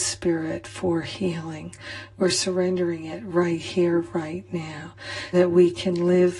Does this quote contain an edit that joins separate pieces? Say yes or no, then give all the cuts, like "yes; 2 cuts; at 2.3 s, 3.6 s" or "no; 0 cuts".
yes; 1 cut; at 5.3 s